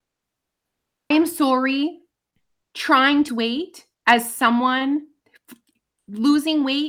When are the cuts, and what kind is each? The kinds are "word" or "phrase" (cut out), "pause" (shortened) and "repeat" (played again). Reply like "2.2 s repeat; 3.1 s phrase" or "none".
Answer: 1.1 s word; 3.3 s word; 3.9 s pause